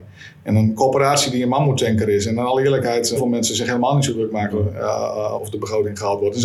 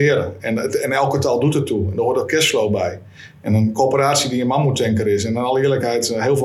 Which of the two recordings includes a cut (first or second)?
first